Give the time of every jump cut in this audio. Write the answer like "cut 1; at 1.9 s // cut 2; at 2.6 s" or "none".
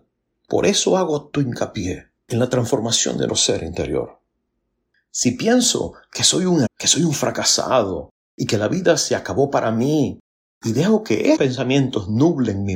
cut 1; at 1.3 s // cut 2; at 3.3 s // cut 3; at 6.7 s // cut 4; at 11.4 s